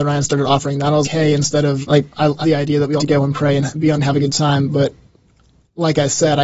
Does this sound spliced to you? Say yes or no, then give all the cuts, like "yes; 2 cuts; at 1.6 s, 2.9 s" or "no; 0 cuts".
yes; 5 cuts; at 1.0 s, 1.8 s, 2.4 s, 3.0 s, 4.0 s